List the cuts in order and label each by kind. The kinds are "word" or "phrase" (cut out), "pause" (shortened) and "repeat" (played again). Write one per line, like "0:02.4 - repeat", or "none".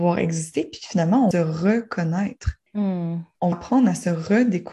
0:01.3 - phrase
0:02.7 - pause
0:03.5 - word

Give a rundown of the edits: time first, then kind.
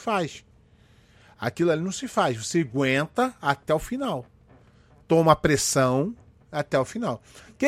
none

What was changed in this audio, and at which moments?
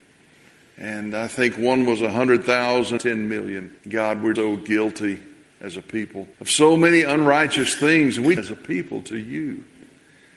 0:03.0 - phrase
0:03.8 - pause
0:04.4 - word
0:05.4 - pause
0:06.3 - pause
0:08.4 - phrase

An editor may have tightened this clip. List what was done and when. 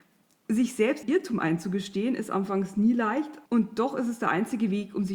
0:01.0 - word
0:03.5 - pause

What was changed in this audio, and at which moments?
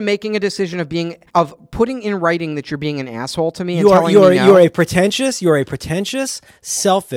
0:01.3 - pause

